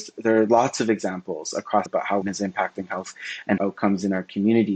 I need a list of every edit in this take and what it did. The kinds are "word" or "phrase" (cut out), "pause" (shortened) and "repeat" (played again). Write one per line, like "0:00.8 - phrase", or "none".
0:01.9 - phrase
0:02.2 - word
0:03.6 - word